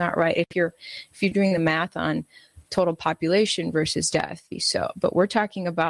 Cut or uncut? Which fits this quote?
cut